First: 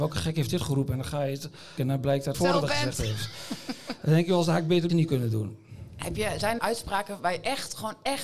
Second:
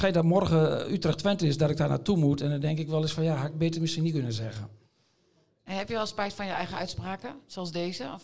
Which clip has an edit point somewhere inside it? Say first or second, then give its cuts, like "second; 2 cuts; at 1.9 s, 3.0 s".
first; 4 cuts; at 1.8 s, 2.3 s, 4.9 s, 6.6 s